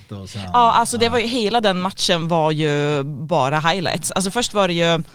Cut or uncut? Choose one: uncut